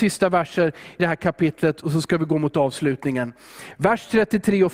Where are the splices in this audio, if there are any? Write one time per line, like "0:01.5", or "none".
0:01.0